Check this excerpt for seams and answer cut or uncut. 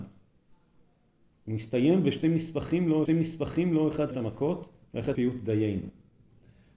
cut